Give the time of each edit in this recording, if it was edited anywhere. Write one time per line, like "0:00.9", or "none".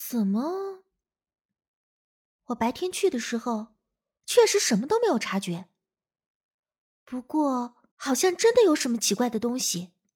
0:07.9